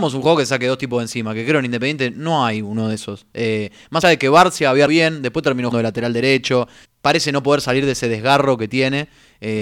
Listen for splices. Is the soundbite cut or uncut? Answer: cut